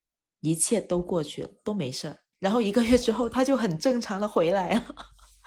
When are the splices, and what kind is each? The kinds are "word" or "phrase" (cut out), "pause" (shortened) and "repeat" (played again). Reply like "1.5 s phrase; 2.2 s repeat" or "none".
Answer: 2.3 s pause